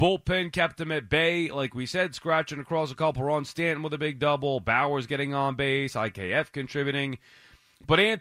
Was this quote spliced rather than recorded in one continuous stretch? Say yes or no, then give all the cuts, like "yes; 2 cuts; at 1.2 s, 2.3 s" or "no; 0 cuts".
no; 0 cuts